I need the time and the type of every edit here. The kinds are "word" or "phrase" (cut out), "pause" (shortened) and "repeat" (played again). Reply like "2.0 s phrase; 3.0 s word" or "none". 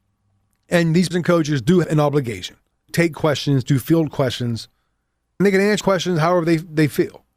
1.1 s word; 1.8 s word; 2.9 s word; 5.4 s word; 5.8 s word